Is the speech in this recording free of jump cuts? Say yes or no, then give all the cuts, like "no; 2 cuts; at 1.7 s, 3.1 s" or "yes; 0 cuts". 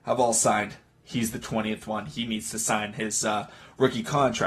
yes; 0 cuts